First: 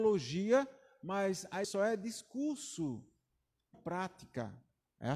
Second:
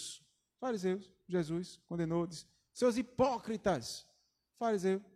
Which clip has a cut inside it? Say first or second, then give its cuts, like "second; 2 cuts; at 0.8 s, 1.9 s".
first; 2 cuts; at 1.6 s, 3.7 s